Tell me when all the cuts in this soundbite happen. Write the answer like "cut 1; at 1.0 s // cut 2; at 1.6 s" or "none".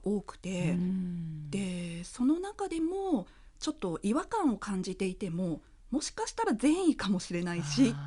none